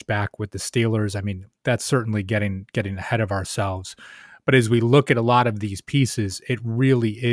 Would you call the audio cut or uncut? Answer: uncut